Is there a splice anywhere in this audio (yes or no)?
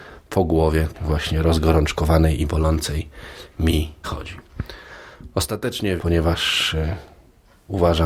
yes